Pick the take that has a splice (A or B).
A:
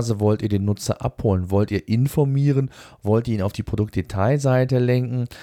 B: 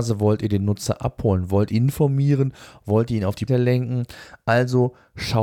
B